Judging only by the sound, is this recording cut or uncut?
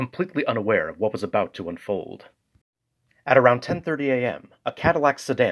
uncut